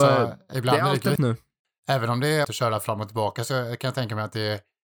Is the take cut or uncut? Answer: cut